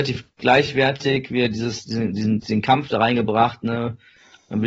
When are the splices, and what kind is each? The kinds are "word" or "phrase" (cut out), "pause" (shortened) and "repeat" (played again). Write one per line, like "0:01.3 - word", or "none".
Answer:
0:02.4 - word